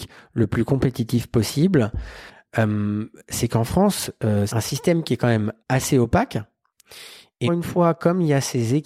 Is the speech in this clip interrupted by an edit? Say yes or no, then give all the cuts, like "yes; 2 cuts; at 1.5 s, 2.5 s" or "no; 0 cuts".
yes; 3 cuts; at 4.5 s, 5.6 s, 7.5 s